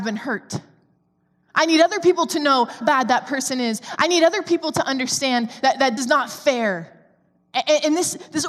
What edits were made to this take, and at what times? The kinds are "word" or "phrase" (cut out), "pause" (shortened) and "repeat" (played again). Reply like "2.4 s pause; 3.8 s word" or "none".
2.8 s word; 5.6 s word; 6.0 s word